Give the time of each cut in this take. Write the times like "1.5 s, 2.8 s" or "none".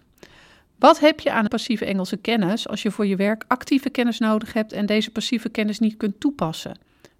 1.5 s